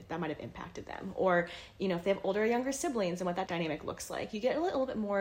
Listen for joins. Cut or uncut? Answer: cut